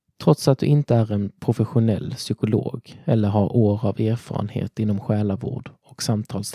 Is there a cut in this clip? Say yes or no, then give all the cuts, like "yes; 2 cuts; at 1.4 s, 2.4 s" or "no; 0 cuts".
no; 0 cuts